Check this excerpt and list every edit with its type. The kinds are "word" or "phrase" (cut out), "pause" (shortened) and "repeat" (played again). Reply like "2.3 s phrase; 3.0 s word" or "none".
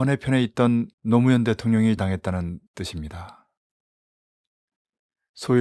0.9 s pause; 2.0 s word; 2.7 s pause